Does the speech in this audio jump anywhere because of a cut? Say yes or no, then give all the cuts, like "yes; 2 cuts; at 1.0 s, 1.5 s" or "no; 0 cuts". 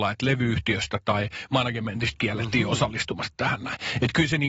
no; 0 cuts